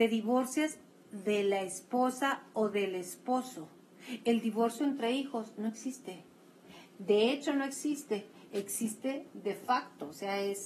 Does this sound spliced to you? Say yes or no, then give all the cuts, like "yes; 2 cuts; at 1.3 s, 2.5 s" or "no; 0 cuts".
no; 0 cuts